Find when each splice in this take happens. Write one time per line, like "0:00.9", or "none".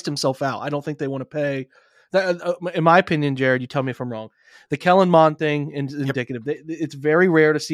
none